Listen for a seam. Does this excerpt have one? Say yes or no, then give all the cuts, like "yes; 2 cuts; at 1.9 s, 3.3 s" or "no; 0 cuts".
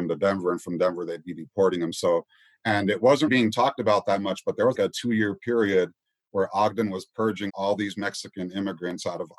yes; 3 cuts; at 3.3 s, 4.7 s, 7.5 s